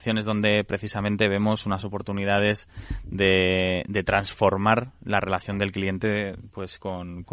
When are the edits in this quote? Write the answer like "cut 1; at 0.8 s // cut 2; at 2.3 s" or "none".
none